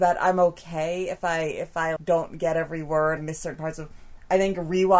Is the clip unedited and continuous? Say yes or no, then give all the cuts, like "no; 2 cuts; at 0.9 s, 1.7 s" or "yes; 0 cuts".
no; 2 cuts; at 2.0 s, 3.2 s